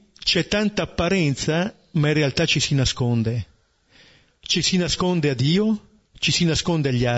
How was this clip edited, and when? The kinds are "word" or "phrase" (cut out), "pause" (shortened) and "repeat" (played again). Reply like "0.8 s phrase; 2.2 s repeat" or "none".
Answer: none